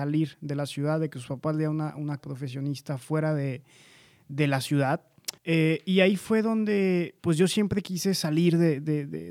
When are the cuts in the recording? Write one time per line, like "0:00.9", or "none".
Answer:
0:02.2
0:05.4
0:07.2